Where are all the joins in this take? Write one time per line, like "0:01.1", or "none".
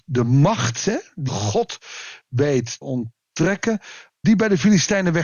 0:01.3
0:02.8
0:04.2